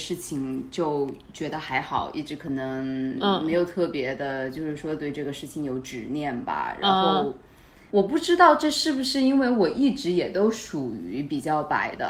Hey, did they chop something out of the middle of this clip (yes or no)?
yes